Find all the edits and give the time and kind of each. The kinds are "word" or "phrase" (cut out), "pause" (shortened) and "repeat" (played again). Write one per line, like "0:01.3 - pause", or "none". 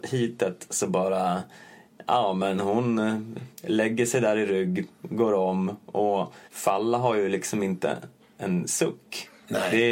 0:03.5 - pause
0:06.5 - pause